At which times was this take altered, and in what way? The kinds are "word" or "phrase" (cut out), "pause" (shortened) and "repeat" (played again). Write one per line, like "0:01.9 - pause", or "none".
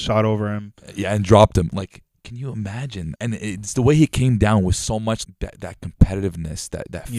0:03.2 - word
0:05.2 - word